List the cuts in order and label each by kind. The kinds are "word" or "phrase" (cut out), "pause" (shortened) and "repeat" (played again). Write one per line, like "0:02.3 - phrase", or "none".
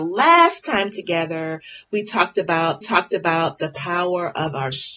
0:02.8 - repeat